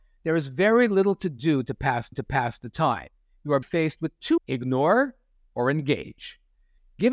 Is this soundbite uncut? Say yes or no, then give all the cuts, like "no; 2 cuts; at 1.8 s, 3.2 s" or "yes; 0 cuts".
no; 3 cuts; at 2.1 s, 3.6 s, 4.4 s